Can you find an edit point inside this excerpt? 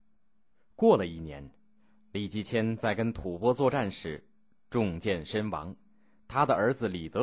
no; 0 cuts

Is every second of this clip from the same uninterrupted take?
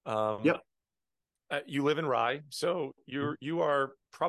yes; 0 cuts

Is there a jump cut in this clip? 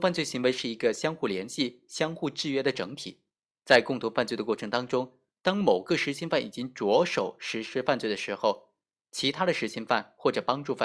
no; 0 cuts

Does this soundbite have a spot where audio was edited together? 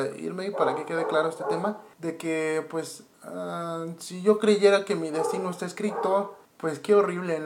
yes; 3 cuts; at 1.9 s, 3.1 s, 6.4 s

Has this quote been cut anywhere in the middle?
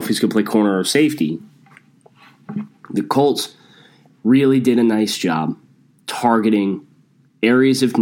no; 0 cuts

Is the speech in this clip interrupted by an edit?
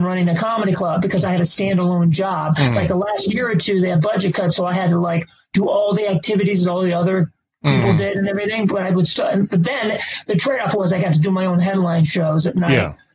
no; 0 cuts

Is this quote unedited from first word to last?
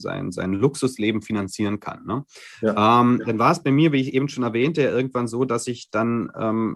yes; 0 cuts

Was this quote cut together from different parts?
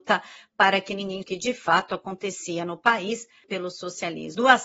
yes; 2 cuts; at 1.2 s, 3.4 s

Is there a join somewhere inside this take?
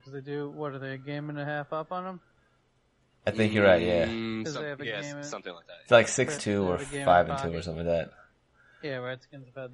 yes; 1 cut; at 6.4 s

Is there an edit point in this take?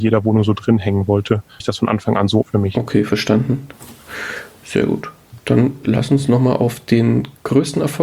yes; 2 cuts; at 1.6 s, 2.4 s

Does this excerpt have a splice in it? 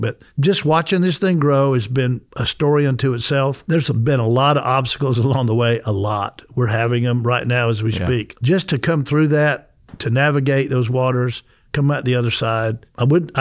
no; 0 cuts

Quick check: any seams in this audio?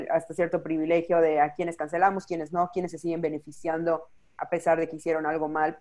no; 0 cuts

